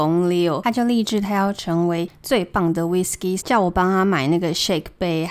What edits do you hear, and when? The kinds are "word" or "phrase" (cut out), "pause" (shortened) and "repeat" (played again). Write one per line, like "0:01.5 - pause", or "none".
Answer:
0:03.4 - phrase